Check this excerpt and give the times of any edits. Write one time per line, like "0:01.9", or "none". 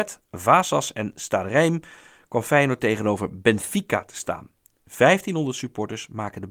none